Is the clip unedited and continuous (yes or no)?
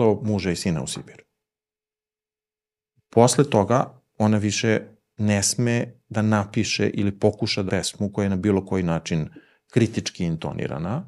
no